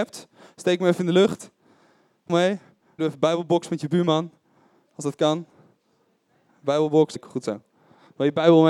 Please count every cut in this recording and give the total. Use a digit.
3